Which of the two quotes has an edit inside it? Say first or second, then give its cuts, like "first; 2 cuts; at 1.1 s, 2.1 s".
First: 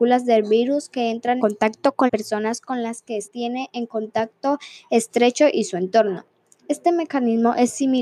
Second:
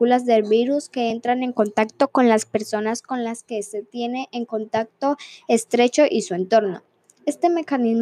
first; 3 cuts; at 1.4 s, 2.1 s, 3.2 s